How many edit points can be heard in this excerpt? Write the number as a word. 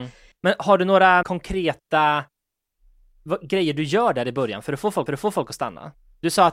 two